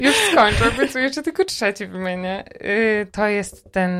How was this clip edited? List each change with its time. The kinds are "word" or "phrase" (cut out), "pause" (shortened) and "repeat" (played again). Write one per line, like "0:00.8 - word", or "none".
none